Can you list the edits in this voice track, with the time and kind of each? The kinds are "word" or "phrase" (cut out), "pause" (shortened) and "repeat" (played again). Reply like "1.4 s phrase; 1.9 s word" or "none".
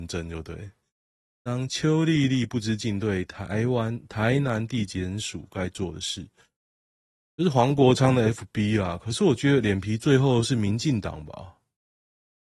none